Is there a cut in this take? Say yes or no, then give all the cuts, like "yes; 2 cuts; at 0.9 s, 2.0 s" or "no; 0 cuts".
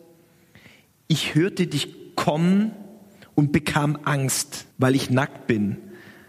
yes; 1 cut; at 4.7 s